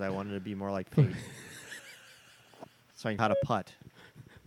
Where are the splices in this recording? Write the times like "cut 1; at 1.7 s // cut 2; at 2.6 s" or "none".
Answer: cut 1; at 1.8 s // cut 2; at 3.2 s